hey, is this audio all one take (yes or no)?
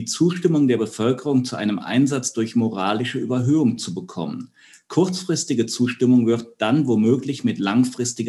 yes